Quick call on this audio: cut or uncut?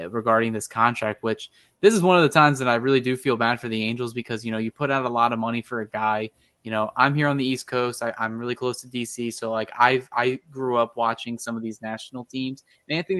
uncut